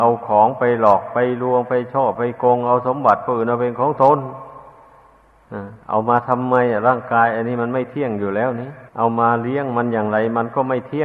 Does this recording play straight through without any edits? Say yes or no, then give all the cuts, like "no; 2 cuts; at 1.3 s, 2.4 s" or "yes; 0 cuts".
no; 2 cuts; at 5.8 s, 8.9 s